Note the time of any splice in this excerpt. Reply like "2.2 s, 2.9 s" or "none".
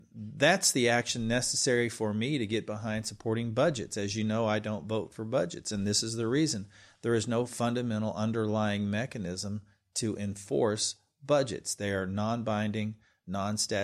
none